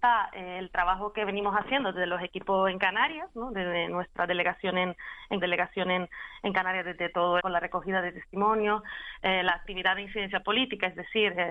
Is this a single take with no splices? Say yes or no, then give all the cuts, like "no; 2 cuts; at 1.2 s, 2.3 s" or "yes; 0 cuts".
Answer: no; 2 cuts; at 5.4 s, 7.4 s